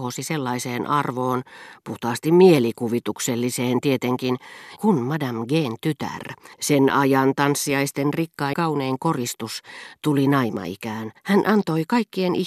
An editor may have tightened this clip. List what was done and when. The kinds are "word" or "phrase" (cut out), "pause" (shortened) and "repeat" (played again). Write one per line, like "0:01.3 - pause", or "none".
0:04.8 - word
0:06.5 - pause
0:08.5 - word
0:11.2 - pause